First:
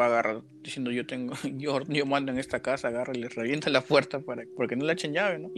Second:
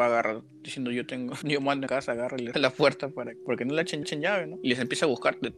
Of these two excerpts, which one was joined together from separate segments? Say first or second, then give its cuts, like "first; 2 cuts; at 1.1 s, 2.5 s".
second; 4 cuts; at 1.4 s, 1.9 s, 2.5 s, 4.0 s